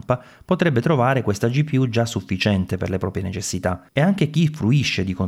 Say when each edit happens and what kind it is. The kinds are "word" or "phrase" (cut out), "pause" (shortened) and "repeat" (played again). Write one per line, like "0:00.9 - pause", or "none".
0:03.9 - pause